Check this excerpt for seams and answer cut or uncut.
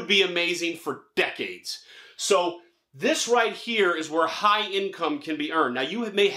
uncut